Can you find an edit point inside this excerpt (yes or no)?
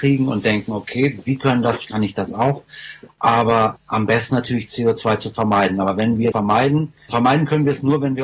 yes